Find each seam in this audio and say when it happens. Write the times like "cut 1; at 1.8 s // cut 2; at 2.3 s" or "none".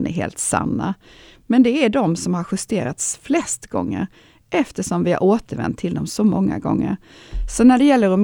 none